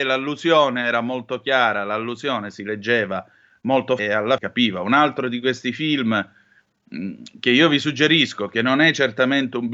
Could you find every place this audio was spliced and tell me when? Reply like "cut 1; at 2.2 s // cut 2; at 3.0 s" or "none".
cut 1; at 4.0 s // cut 2; at 4.4 s